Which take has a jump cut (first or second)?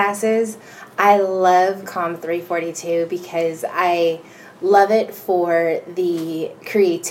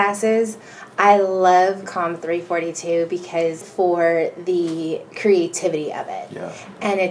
second